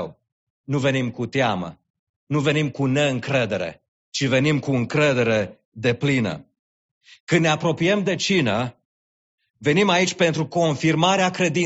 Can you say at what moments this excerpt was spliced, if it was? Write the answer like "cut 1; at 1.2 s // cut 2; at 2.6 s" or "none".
none